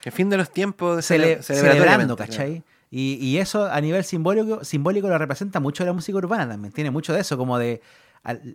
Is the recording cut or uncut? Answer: uncut